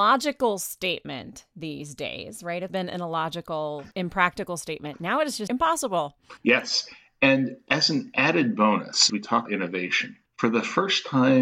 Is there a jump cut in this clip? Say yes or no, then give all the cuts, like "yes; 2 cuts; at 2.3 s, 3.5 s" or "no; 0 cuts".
yes; 7 cuts; at 2.7 s, 3.9 s, 5.5 s, 6.4 s, 9.1 s, 9.5 s, 10.3 s